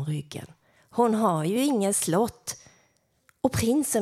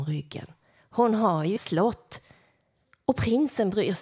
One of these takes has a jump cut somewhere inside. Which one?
second; 1 cut; at 1.6 s

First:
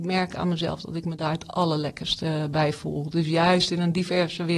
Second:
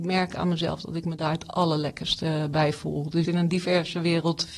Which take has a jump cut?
second; 1 cut; at 3.2 s

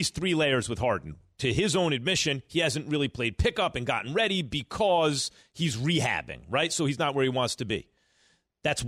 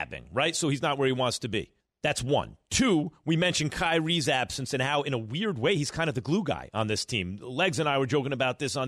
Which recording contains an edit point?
second; 1 cut; at 1.8 s

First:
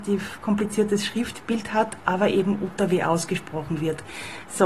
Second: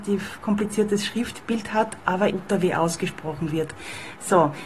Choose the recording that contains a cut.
second; 1 cut; at 2.3 s

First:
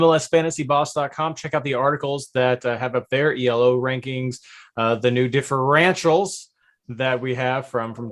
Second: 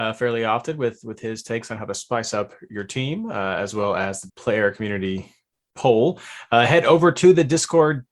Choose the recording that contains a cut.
second; 1 cut; at 4.3 s

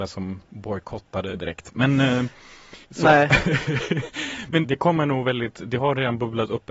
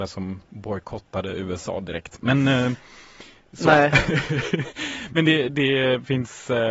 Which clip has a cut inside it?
first; 3 cuts; at 1.3 s, 2.8 s, 4.6 s

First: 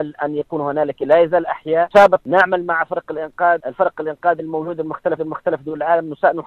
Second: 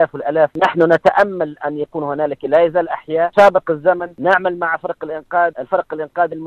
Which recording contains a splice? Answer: first; 2 cuts; at 2.2 s, 5.2 s

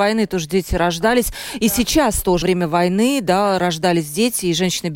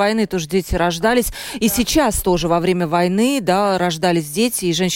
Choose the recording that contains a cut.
first; 1 cut; at 2.4 s

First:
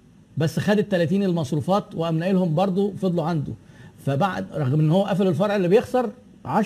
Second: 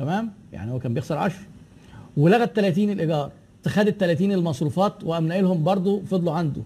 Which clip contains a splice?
second; 1 cut; at 3.6 s

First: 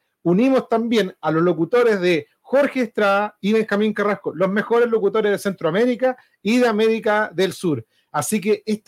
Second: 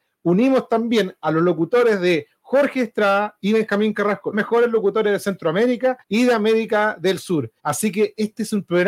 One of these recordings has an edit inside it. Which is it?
second; 3 cuts; at 4.3 s, 6.0 s, 7.6 s

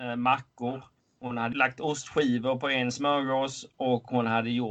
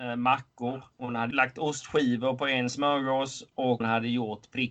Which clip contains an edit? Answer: second; 2 cuts; at 0.9 s, 3.8 s

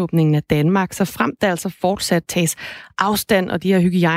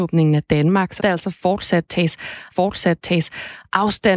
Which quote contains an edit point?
second; 2 cuts; at 1.0 s, 2.5 s

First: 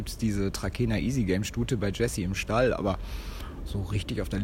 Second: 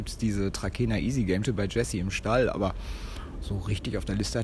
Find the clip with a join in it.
second; 1 cut; at 1.4 s

